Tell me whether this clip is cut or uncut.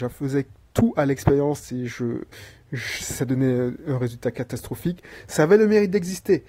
uncut